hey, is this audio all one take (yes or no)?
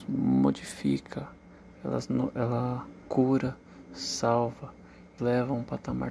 no